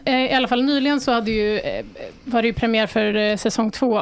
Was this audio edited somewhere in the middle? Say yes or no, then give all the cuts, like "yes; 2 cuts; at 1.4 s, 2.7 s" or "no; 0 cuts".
no; 0 cuts